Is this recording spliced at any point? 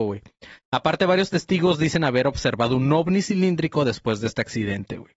no; 0 cuts

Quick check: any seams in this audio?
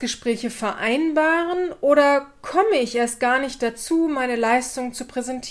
no; 0 cuts

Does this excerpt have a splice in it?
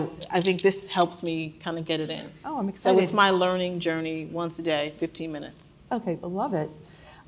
no; 0 cuts

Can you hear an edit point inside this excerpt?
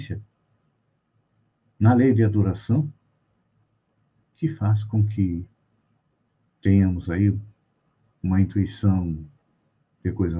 no; 0 cuts

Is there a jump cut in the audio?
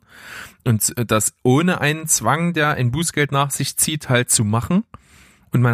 no; 0 cuts

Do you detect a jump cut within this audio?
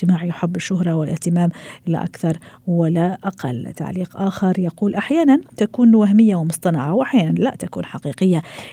no; 0 cuts

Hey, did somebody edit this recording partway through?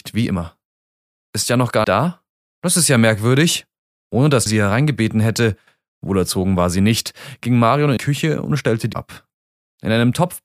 yes; 4 cuts; at 1.8 s, 4.5 s, 8.0 s, 8.9 s

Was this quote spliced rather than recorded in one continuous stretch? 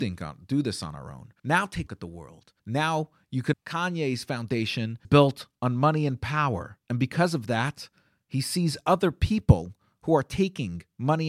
yes; 6 cuts; at 1.4 s, 1.9 s, 2.6 s, 3.5 s, 5.0 s, 6.8 s

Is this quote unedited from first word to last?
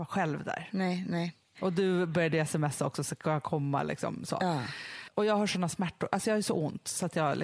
yes; 0 cuts

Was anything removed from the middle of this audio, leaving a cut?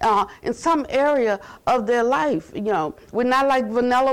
no; 0 cuts

